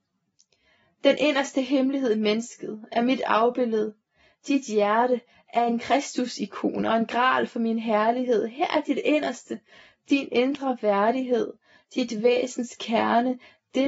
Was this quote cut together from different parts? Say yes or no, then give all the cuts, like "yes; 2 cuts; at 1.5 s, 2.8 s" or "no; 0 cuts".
no; 0 cuts